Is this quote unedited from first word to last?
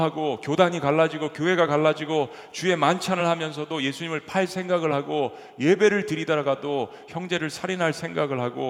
yes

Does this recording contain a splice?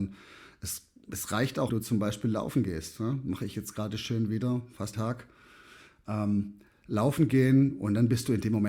yes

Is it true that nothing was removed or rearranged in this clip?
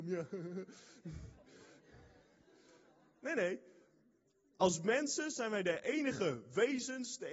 yes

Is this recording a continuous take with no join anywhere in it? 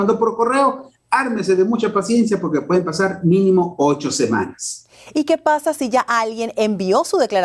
yes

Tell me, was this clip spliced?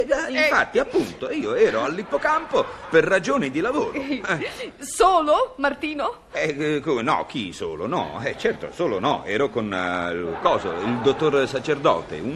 no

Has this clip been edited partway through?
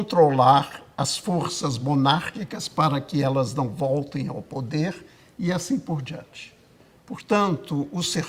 no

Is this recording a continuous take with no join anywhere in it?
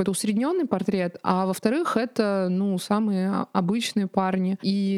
yes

